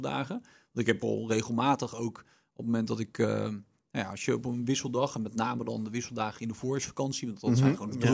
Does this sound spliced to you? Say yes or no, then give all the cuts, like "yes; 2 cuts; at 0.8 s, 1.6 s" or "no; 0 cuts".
no; 0 cuts